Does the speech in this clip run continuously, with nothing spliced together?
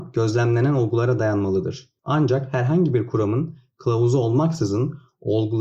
no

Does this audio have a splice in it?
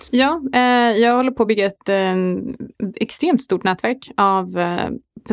no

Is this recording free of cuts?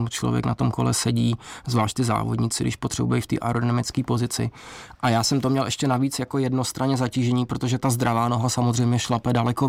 yes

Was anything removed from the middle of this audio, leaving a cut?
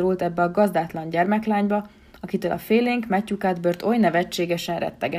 no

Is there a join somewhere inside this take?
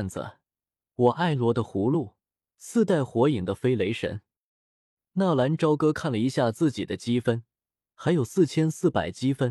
no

